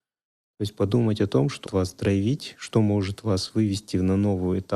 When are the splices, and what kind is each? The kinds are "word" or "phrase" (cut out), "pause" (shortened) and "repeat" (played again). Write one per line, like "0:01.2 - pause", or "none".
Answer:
0:01.7 - word

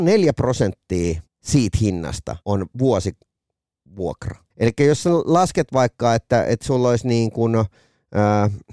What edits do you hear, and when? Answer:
0:01.3 - pause
0:02.4 - pause
0:04.5 - pause

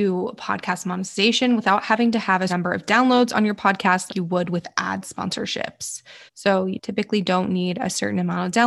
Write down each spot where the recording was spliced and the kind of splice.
0:02.5 - word
0:04.1 - word
0:06.3 - pause

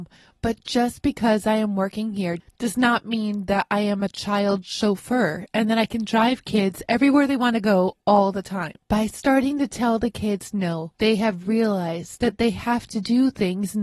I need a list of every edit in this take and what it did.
0:08.8 - pause
0:10.9 - pause

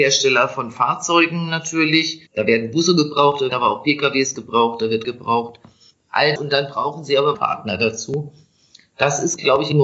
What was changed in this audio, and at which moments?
0:02.3 - pause
0:03.5 - word
0:05.0 - word
0:06.4 - word
0:07.3 - phrase

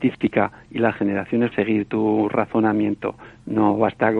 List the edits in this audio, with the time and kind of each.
0:01.5 - phrase

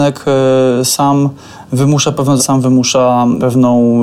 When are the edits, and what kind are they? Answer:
0:02.4 - word

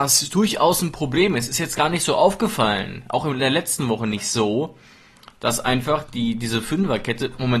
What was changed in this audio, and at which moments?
none

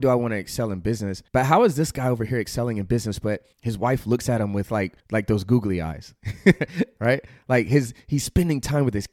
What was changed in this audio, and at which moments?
0:01.3 - pause
0:03.5 - pause
0:05.0 - pause

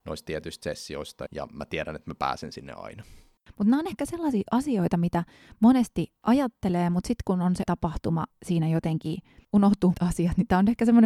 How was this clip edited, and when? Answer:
0:01.3 - word
0:07.7 - word
0:08.3 - word
0:09.9 - word

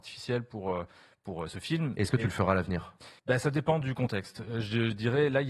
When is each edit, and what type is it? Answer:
0:03.2 - pause

